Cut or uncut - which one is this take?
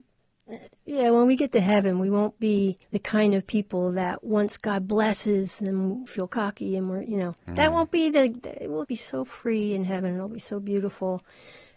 cut